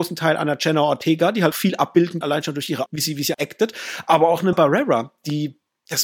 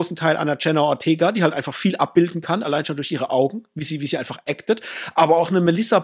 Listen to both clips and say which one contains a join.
first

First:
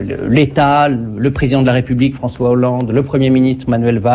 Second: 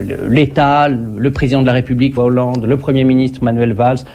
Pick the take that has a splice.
second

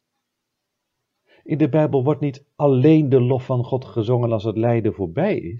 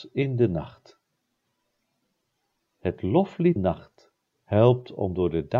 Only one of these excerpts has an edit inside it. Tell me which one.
second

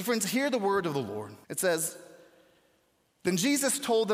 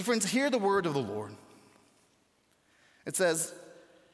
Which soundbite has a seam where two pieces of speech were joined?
first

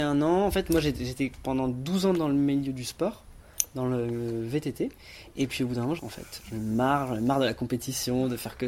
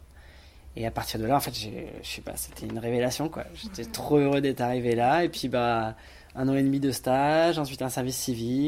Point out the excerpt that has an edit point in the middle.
first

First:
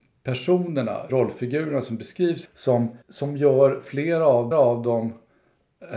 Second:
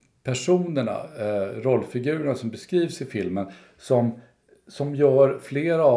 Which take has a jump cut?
first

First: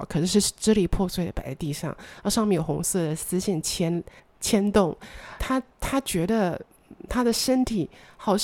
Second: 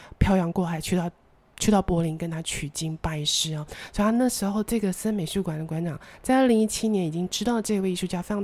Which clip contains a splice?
first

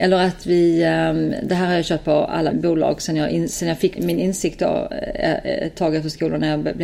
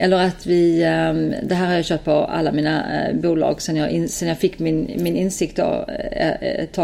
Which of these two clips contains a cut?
first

